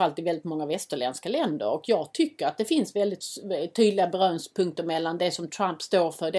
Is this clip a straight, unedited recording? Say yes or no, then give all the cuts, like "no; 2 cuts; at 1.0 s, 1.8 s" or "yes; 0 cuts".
yes; 0 cuts